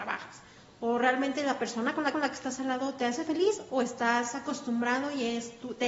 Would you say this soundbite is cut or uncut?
cut